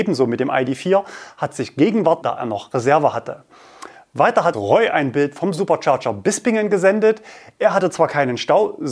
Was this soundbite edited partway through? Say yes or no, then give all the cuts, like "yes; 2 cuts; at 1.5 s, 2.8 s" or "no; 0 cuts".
yes; 2 cuts; at 2.2 s, 4.5 s